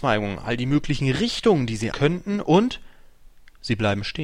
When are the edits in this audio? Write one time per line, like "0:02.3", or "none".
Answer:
0:01.9